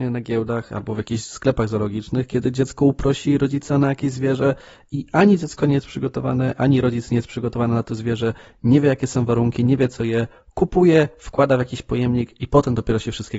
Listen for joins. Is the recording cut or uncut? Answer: uncut